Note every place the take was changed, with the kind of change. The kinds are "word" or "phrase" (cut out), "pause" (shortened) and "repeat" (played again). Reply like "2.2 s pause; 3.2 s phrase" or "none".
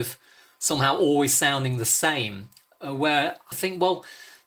3.5 s phrase